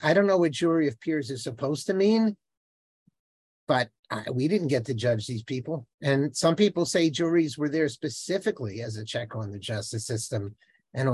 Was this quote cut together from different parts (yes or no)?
yes